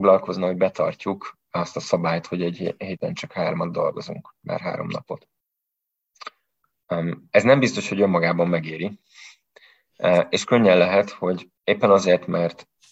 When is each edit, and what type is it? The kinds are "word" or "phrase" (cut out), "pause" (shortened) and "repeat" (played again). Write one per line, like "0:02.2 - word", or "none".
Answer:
0:11.6 - pause